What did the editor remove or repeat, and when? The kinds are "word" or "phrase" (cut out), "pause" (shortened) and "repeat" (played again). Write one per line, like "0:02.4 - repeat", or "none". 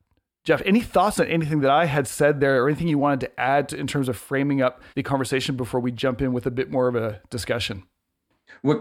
0:04.9 - pause